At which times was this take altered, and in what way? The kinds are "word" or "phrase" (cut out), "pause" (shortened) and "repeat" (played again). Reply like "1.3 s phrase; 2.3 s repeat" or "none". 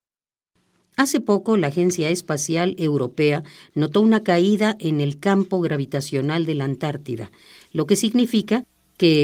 none